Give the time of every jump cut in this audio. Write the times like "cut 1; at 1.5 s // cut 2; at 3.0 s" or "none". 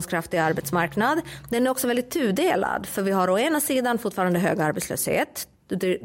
none